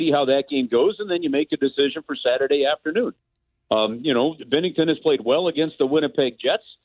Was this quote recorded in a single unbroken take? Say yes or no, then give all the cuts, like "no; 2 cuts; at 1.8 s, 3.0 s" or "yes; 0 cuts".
yes; 0 cuts